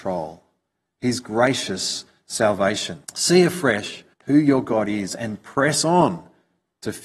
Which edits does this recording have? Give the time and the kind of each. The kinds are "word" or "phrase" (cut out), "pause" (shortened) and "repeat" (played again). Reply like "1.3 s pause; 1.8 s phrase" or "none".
3.0 s pause; 4.1 s pause